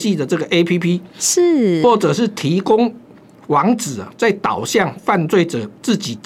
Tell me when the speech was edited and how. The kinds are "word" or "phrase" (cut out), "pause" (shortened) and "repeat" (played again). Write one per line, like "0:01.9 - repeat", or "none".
none